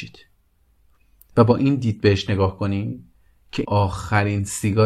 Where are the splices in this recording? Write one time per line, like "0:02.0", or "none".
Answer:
0:03.6